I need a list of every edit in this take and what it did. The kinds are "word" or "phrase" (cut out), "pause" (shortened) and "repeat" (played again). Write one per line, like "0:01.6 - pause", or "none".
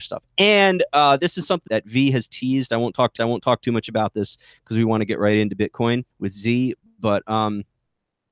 0:01.7 - word
0:03.2 - repeat
0:06.1 - pause